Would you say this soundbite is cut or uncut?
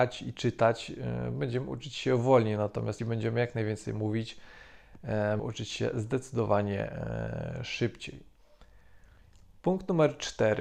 cut